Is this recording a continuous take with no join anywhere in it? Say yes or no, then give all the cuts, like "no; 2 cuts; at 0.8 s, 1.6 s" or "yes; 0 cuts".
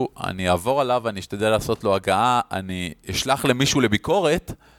yes; 0 cuts